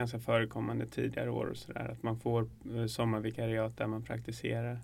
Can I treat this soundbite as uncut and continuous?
yes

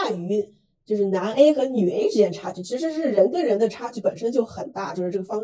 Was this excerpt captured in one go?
yes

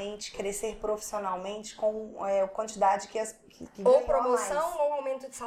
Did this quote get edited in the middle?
no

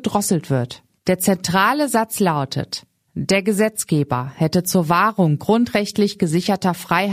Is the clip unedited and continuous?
yes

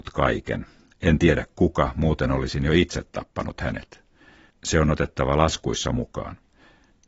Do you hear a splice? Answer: no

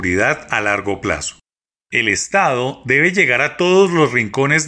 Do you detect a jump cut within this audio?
no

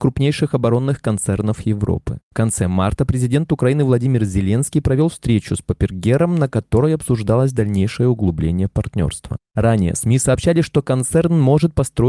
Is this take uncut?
yes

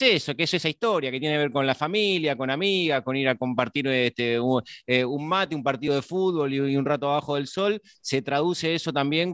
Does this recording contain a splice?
no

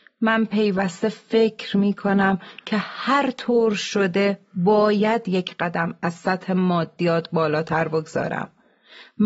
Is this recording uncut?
yes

